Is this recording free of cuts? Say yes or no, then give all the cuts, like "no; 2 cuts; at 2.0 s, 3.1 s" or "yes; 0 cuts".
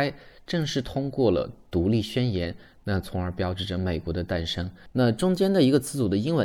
yes; 0 cuts